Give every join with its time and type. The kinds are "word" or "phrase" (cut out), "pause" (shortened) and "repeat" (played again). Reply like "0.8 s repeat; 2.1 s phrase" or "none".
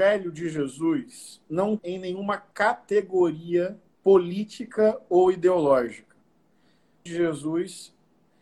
1.8 s word; 4.0 s pause; 7.1 s phrase

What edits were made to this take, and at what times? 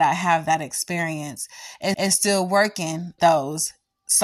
1.9 s repeat; 3.2 s word

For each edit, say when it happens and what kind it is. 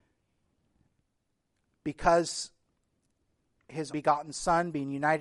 3.9 s word

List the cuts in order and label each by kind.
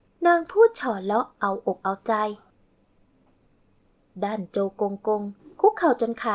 none

